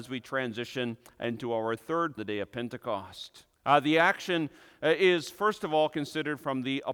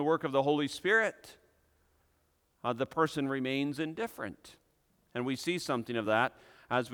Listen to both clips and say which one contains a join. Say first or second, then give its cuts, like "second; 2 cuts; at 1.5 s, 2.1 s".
first; 2 cuts; at 2.2 s, 3.5 s